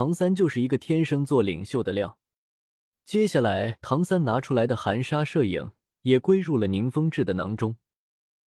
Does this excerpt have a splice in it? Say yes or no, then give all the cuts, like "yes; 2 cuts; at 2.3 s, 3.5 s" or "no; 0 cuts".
no; 0 cuts